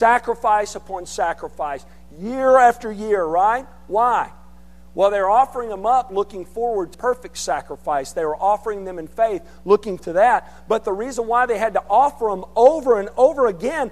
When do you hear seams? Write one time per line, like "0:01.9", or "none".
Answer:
0:06.9
0:10.0